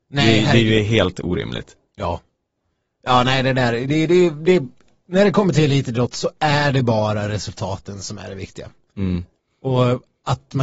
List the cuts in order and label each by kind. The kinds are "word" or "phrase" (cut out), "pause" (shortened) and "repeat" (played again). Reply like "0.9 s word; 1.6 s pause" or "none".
none